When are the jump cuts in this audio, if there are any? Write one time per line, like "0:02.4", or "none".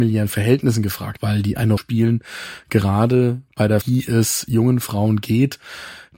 0:01.2
0:01.8
0:03.8